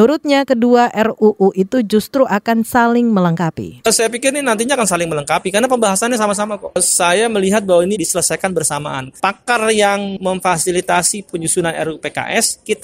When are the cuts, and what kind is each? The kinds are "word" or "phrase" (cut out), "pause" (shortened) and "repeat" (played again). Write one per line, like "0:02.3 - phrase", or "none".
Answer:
0:07.9 - word
0:09.1 - word
0:11.3 - word